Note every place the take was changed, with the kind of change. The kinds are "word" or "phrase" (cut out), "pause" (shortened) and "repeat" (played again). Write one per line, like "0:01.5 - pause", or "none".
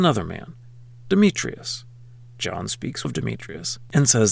0:03.0 - word